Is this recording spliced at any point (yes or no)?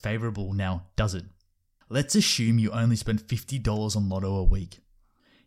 no